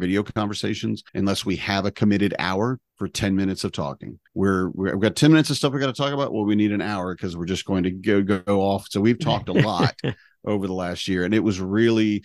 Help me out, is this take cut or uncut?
cut